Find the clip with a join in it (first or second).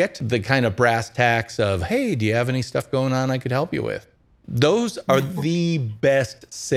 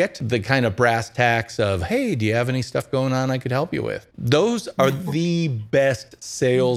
second